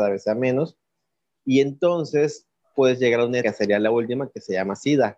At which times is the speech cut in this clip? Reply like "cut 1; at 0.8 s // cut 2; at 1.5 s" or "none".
cut 1; at 2.7 s // cut 2; at 3.4 s